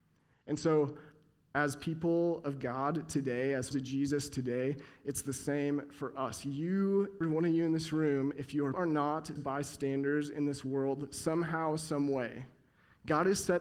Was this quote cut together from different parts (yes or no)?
yes